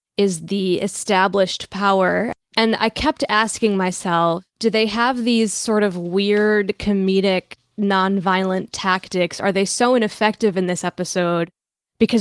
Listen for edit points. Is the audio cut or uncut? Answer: cut